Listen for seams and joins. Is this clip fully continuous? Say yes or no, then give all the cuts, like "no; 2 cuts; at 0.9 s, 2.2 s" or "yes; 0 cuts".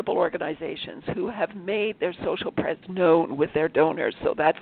no; 1 cut; at 2.8 s